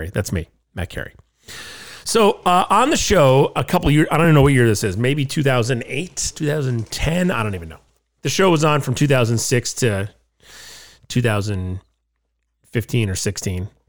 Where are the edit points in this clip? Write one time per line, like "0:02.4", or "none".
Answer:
none